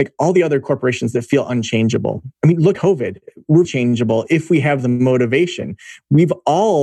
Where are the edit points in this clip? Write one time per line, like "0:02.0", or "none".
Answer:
0:02.3
0:02.7
0:03.6